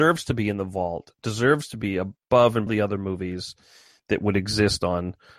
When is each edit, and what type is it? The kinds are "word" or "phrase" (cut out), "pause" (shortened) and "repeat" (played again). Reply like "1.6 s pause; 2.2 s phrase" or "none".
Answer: 2.7 s phrase